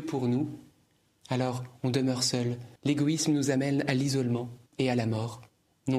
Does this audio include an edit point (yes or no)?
yes